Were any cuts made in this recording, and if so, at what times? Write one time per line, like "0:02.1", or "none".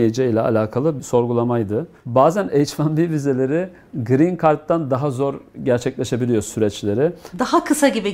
0:01.0